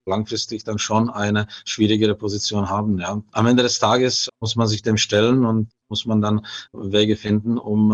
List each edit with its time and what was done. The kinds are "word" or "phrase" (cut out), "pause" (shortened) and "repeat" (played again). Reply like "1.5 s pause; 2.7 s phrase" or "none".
4.3 s pause; 6.7 s pause